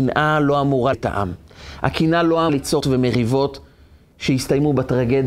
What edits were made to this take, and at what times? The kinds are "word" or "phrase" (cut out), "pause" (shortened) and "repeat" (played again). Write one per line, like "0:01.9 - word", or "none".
0:00.9 - word
0:02.5 - word
0:02.8 - word